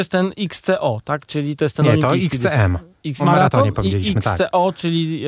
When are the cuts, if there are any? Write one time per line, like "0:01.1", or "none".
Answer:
0:01.6
0:03.2